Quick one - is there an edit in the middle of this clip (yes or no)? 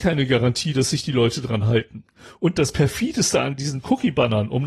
no